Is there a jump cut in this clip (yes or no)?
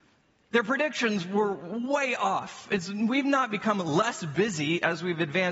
no